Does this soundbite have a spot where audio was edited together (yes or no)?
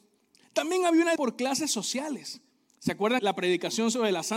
yes